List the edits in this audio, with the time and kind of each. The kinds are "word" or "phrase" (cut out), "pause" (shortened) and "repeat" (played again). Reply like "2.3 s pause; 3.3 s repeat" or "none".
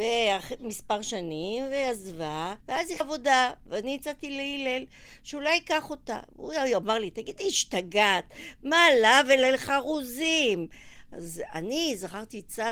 2.6 s pause; 3.0 s word